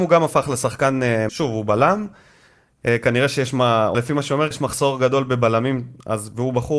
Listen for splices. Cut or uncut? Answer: cut